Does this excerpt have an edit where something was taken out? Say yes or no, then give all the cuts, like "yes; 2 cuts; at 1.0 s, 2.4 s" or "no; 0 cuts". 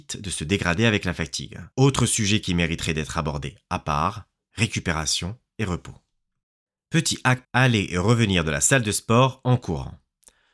yes; 3 cuts; at 1.7 s, 6.7 s, 7.4 s